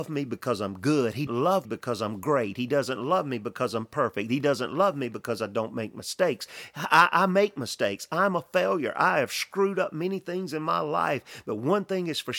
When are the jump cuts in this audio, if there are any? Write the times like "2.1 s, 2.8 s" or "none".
1.3 s, 1.6 s